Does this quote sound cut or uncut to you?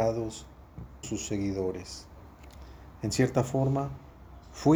cut